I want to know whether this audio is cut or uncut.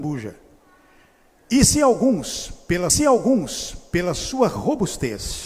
cut